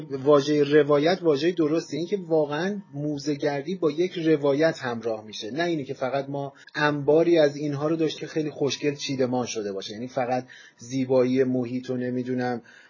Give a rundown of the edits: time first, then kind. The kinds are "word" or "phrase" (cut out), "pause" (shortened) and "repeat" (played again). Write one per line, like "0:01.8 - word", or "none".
0:02.0 - word
0:06.6 - pause
0:08.2 - word